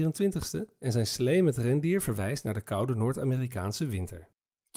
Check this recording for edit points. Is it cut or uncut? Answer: uncut